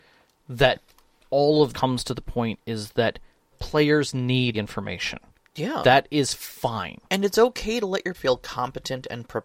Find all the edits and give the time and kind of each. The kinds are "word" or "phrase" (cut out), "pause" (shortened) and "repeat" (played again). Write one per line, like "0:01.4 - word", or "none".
0:01.7 - word
0:03.5 - word
0:04.5 - word
0:07.0 - pause
0:08.1 - word